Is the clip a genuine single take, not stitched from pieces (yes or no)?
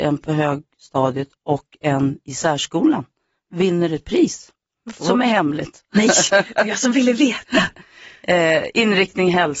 yes